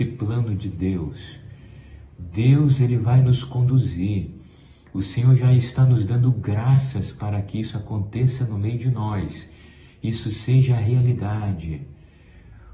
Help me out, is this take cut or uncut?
uncut